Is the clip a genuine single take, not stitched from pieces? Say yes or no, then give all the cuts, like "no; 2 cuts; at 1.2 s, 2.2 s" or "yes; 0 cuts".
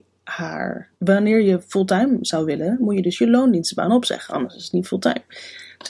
no; 1 cut; at 0.9 s